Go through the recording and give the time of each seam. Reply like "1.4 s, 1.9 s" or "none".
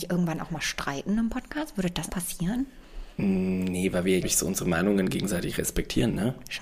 2.1 s, 3.1 s, 4.2 s